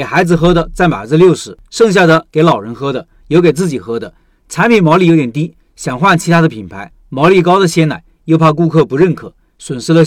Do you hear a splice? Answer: no; 0 cuts

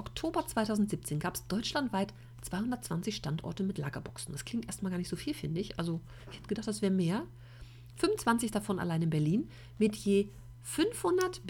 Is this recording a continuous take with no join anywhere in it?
yes; 0 cuts

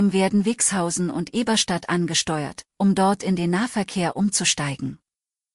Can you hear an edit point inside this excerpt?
no; 0 cuts

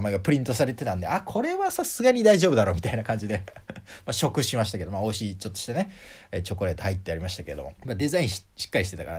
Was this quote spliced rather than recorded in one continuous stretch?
yes; 1 cut; at 7.8 s

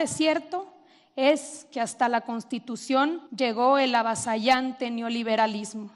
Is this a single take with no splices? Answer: no; 1 cut; at 3.3 s

